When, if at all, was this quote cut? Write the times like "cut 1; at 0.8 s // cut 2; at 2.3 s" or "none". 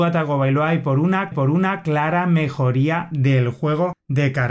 cut 1; at 1.3 s